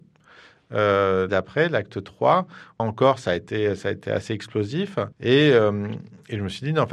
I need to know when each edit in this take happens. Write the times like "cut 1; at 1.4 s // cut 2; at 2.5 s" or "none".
cut 1; at 1.3 s // cut 2; at 2.8 s // cut 3; at 5.1 s